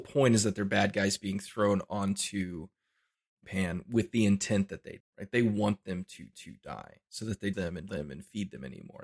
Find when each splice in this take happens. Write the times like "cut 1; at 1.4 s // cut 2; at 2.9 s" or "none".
cut 1; at 3.4 s // cut 2; at 5.0 s // cut 3; at 6.3 s // cut 4; at 7.5 s // cut 5; at 7.9 s